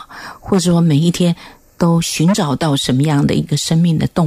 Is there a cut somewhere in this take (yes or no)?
no